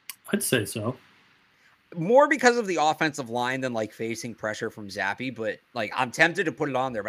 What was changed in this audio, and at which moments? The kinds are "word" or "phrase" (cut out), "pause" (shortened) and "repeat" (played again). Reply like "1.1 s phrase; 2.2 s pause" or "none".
none